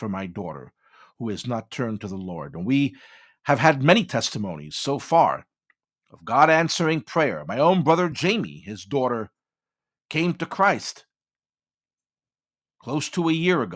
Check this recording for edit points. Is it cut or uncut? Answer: uncut